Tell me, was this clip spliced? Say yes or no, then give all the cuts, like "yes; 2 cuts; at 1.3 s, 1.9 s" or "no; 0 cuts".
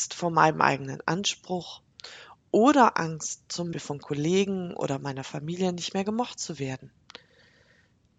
yes; 1 cut; at 3.7 s